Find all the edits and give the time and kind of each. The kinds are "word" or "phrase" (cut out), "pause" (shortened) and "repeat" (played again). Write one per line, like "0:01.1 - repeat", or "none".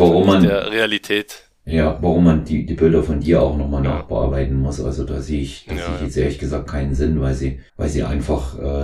0:07.7 - pause